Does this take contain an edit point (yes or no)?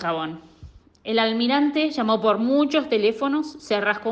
no